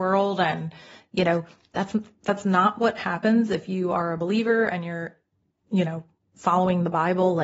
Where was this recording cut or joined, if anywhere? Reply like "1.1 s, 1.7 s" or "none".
none